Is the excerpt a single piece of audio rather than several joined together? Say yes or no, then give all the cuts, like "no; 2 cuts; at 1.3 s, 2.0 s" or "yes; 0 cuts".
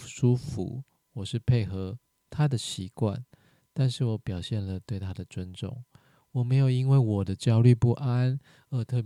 yes; 0 cuts